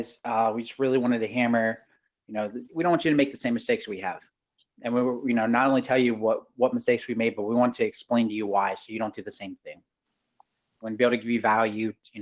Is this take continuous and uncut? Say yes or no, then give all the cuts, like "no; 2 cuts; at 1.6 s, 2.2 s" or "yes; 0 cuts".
yes; 0 cuts